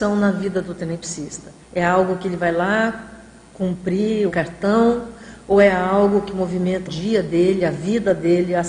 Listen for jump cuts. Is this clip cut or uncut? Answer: cut